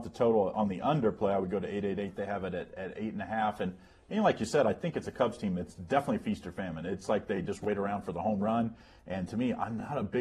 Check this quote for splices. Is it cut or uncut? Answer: uncut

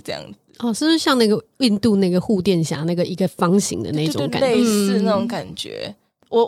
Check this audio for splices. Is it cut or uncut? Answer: uncut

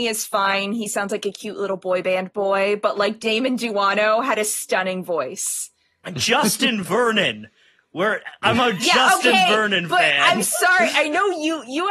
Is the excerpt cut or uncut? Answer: uncut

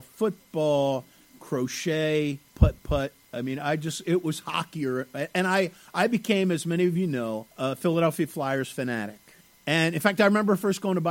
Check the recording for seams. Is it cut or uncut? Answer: cut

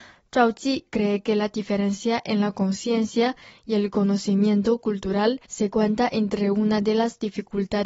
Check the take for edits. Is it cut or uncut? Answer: cut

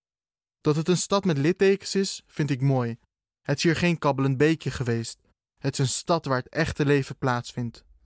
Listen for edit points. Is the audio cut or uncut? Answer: uncut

